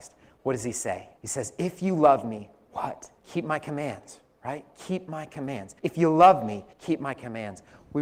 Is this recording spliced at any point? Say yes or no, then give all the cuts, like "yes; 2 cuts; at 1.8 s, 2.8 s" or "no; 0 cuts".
yes; 4 cuts; at 1.2 s, 3.2 s, 5.8 s, 6.7 s